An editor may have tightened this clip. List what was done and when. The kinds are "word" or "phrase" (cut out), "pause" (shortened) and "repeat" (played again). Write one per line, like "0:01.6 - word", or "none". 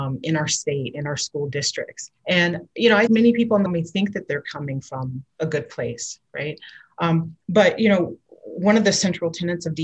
0:02.2 - pause
0:03.1 - word
0:03.7 - phrase
0:05.3 - pause